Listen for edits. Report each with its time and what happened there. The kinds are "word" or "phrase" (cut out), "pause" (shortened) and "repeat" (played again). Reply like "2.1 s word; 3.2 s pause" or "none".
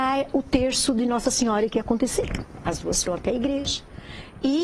3.1 s word